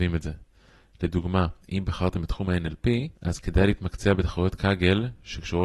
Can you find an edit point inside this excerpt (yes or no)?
yes